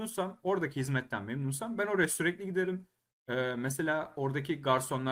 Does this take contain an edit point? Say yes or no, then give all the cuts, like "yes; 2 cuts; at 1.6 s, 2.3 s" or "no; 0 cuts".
no; 0 cuts